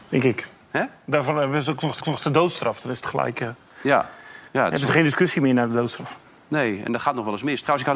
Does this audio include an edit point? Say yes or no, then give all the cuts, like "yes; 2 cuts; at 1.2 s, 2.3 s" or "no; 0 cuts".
yes; 2 cuts; at 2.0 s, 4.5 s